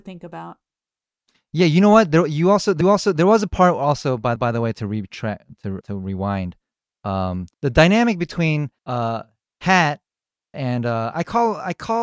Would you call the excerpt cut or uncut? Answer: cut